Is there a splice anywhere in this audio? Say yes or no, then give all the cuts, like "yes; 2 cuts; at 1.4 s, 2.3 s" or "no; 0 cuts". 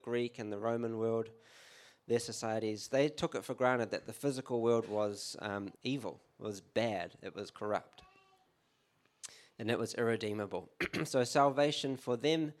yes; 2 cuts; at 2.9 s, 5.7 s